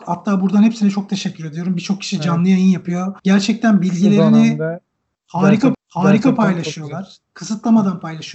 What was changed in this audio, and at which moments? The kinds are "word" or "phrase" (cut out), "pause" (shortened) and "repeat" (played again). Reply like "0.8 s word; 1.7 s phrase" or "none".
3.2 s pause; 5.7 s repeat